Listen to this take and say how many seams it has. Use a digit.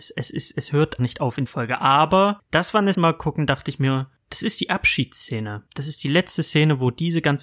3